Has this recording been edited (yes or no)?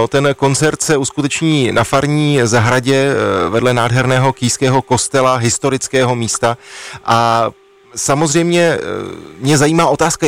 no